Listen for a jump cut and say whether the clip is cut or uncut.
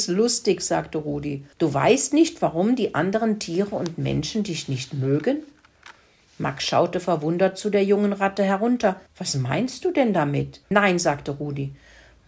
cut